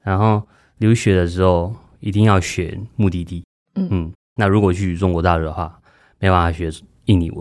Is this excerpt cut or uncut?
uncut